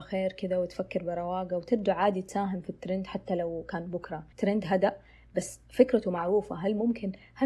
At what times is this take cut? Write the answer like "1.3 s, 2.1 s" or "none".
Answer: 4.3 s